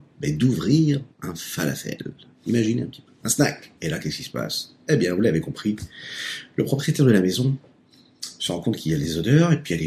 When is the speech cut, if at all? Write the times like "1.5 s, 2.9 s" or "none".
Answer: 1.1 s, 3.1 s, 3.8 s